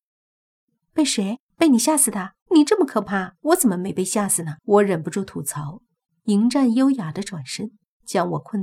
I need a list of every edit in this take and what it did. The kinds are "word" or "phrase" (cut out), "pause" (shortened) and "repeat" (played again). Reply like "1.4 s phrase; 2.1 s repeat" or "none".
1.5 s pause; 2.4 s pause; 3.4 s pause; 4.6 s pause; 6.1 s pause